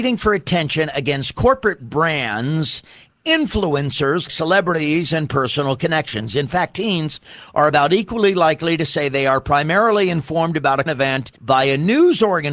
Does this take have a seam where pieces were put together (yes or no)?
yes